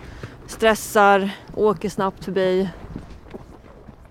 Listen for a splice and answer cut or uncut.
cut